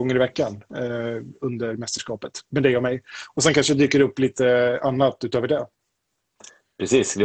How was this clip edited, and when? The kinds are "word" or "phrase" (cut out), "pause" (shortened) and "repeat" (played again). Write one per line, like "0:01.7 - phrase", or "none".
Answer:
none